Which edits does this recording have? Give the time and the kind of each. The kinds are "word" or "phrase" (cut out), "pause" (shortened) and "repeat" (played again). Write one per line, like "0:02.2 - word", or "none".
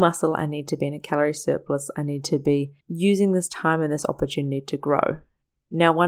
0:02.8 - pause